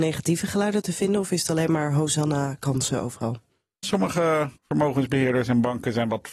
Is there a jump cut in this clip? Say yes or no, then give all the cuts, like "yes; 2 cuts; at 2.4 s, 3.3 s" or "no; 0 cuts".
yes; 2 cuts; at 3.8 s, 4.6 s